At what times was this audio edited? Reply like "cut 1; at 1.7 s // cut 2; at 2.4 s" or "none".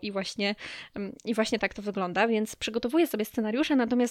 none